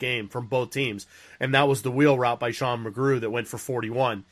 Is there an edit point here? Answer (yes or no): no